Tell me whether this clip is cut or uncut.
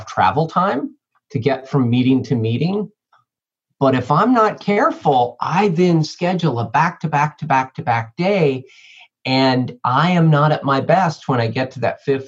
uncut